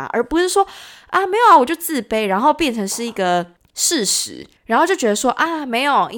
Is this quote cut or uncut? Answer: cut